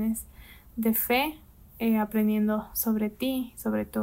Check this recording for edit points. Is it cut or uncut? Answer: uncut